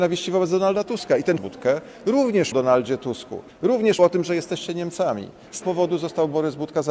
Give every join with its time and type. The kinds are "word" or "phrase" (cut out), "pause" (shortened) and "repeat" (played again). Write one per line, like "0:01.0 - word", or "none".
0:01.4 - phrase
0:02.5 - phrase
0:04.0 - word
0:05.6 - word